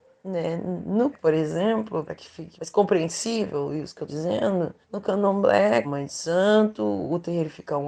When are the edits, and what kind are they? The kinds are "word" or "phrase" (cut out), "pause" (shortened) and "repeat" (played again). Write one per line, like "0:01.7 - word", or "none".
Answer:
0:01.1 - word
0:02.1 - word
0:02.6 - word
0:04.1 - word
0:04.8 - pause
0:05.8 - phrase